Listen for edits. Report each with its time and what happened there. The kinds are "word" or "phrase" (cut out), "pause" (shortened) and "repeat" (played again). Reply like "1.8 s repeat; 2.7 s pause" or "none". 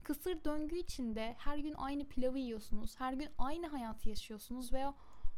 none

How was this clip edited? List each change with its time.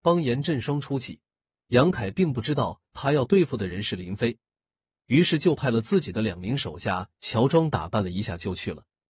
none

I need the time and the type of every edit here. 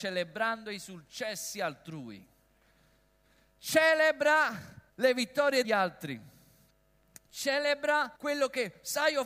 4.9 s pause; 5.6 s word; 8.2 s pause

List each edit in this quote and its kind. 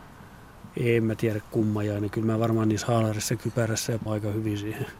4.1 s phrase

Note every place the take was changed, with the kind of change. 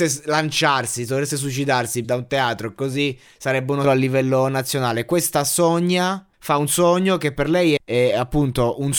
2.0 s phrase; 3.8 s word; 6.3 s pause; 7.8 s word

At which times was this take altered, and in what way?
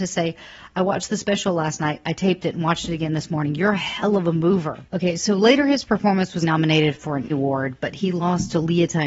4.9 s pause; 6.4 s word; 7.3 s word

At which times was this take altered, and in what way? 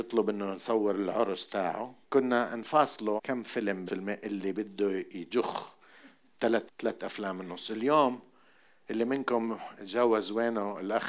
2.0 s pause; 3.2 s word; 3.9 s phrase; 6.7 s word

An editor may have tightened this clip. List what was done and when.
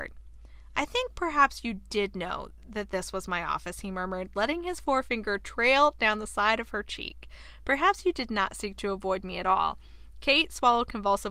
none

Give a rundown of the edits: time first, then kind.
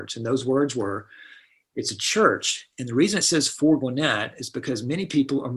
none

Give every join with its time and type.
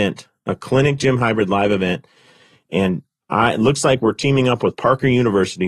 none

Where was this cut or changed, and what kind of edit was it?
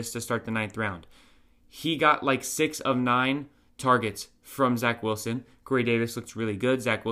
none

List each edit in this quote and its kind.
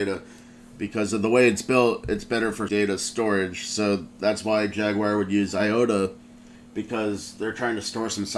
2.7 s word

